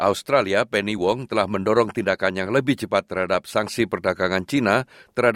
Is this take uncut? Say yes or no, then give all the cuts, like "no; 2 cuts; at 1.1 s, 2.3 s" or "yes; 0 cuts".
yes; 0 cuts